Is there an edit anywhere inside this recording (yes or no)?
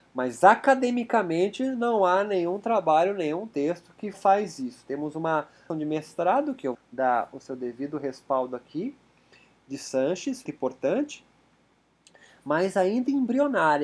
yes